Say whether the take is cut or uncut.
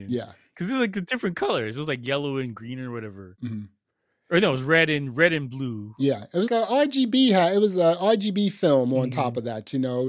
cut